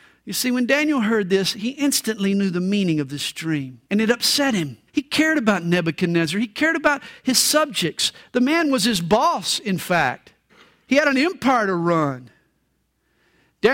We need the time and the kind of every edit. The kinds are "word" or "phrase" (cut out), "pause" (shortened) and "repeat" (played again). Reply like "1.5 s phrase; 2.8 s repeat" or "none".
3.8 s pause; 4.9 s pause; 10.5 s pause